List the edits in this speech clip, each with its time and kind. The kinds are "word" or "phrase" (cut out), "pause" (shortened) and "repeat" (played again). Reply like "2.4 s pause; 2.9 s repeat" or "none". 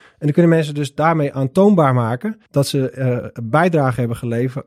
2.5 s pause